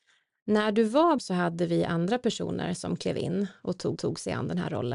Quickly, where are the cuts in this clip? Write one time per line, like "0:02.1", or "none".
0:01.2
0:04.0